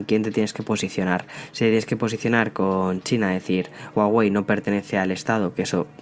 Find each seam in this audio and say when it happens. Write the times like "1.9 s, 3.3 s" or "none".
3.9 s